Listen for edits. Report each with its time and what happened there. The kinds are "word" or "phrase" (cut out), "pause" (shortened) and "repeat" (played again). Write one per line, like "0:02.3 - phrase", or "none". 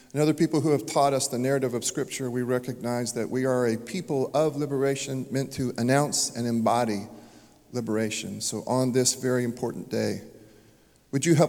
none